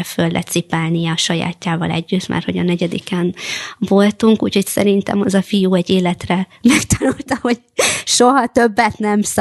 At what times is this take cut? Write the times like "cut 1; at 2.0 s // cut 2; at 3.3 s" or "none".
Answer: none